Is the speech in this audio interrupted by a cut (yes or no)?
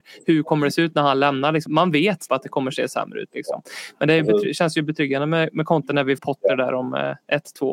yes